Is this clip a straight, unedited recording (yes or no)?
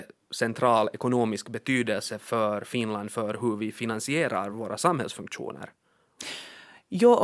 yes